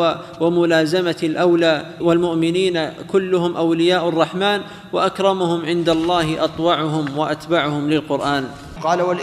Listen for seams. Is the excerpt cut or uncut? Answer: uncut